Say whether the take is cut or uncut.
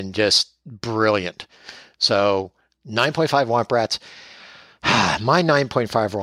uncut